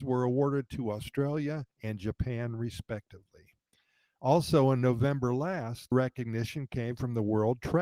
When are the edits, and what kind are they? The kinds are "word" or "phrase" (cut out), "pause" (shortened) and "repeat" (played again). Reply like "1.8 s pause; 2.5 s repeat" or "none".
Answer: 1.7 s pause; 5.9 s word